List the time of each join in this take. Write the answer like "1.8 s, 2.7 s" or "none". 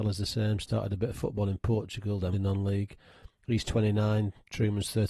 2.3 s